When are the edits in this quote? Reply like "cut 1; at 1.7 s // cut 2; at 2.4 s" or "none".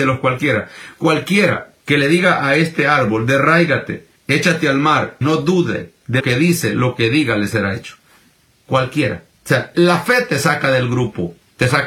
cut 1; at 1.8 s // cut 2; at 4.2 s // cut 3; at 5.2 s // cut 4; at 6.2 s // cut 5; at 9.3 s // cut 6; at 9.7 s